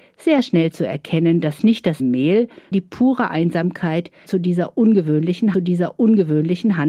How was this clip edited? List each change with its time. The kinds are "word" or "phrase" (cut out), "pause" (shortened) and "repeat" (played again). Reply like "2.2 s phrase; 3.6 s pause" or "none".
2.0 s word; 2.7 s word; 4.3 s word; 5.5 s repeat

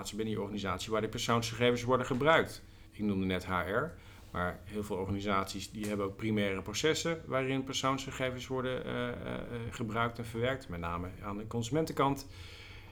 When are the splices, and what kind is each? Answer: 2.9 s pause

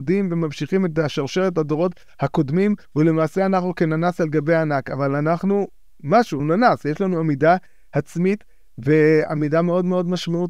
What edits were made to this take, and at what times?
6.4 s word

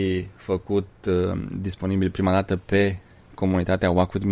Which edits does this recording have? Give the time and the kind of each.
none

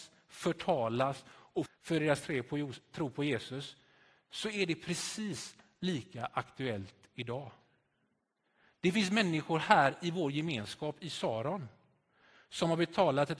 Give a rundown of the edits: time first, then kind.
1.7 s word

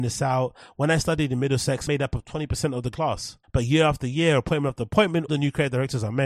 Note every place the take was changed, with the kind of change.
1.9 s word; 2.9 s word; 3.4 s pause; 5.3 s word

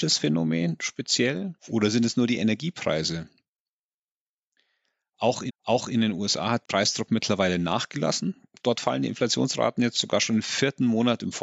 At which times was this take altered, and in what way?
1.6 s pause; 5.5 s repeat; 6.6 s word

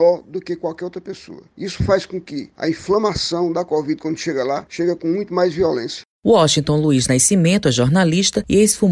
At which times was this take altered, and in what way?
none

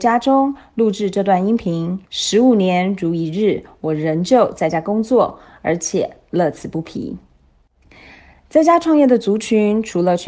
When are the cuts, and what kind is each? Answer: 2.0 s pause

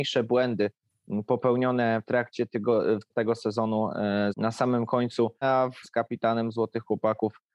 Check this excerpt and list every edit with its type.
2.0 s word; 3.1 s word; 4.3 s word; 5.4 s word; 5.8 s word

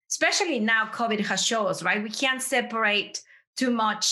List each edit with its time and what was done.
none

